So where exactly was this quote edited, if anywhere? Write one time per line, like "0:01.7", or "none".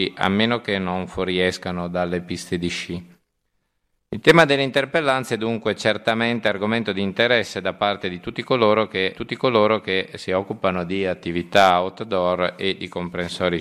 0:09.1

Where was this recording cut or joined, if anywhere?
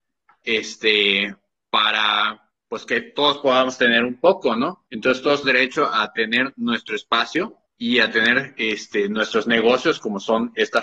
0:02.6
0:04.9
0:05.4
0:07.7

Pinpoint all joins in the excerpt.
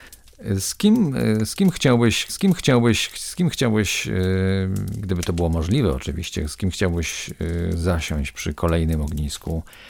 0:02.3

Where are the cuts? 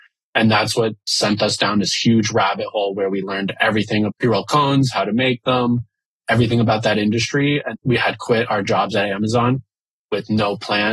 0:04.1
0:07.7

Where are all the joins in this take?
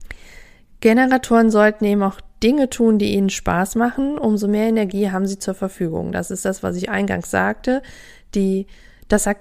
none

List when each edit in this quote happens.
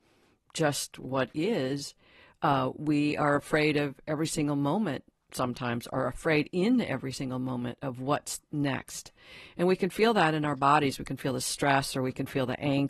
none

